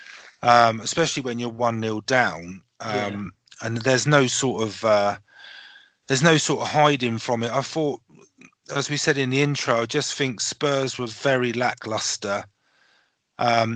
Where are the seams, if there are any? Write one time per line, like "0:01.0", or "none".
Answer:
none

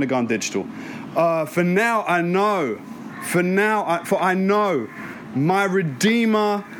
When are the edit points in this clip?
none

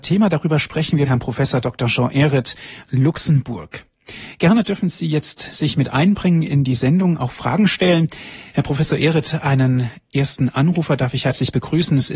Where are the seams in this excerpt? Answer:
0:01.0
0:02.8

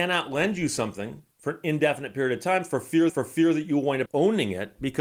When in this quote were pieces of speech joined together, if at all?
0:03.1
0:04.1

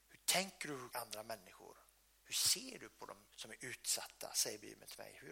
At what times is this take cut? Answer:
0:00.9
0:03.3

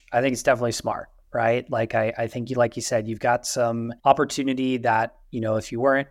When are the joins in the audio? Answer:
0:04.0

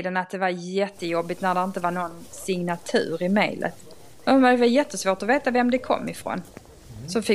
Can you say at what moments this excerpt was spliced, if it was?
none

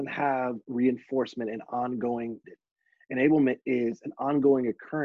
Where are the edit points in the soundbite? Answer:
0:02.4

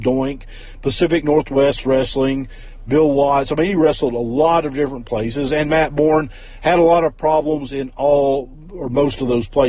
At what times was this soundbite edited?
none

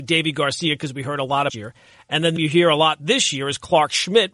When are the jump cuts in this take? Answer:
0:01.5
0:02.4

